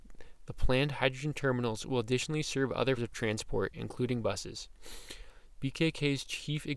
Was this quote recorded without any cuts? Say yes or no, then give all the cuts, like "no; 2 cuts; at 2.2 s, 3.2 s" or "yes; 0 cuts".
no; 1 cut; at 3.0 s